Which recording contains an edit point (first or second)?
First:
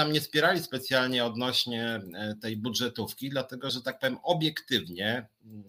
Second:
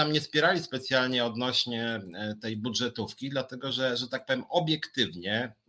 first